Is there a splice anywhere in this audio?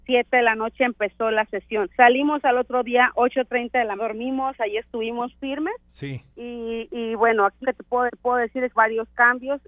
yes; 5 cuts; at 1.9 s, 4.0 s, 7.6 s, 8.1 s, 8.7 s

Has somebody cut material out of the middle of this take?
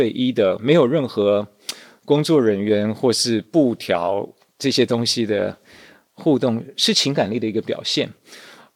no; 0 cuts

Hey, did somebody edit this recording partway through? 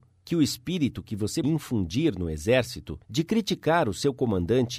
yes; 2 cuts; at 1.4 s, 3.0 s

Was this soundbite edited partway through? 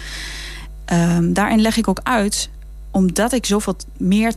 no; 0 cuts

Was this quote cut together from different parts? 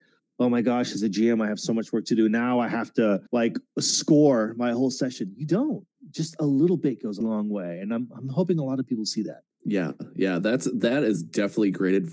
yes; 3 cuts; at 3.3 s, 7.2 s, 9.5 s

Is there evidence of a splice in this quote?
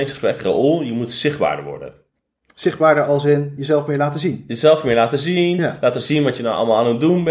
no; 0 cuts

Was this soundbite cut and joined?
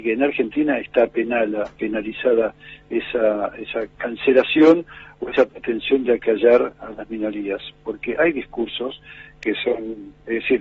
no; 0 cuts

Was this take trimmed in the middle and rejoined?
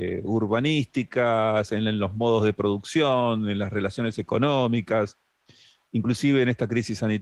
no; 0 cuts

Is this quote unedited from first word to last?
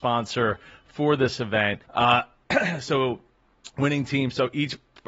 no; 1 cut; at 1.8 s

